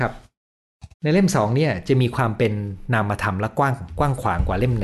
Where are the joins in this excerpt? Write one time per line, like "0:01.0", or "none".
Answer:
0:00.9